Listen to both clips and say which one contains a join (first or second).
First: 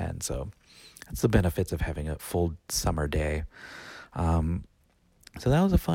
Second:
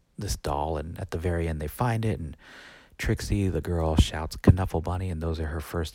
first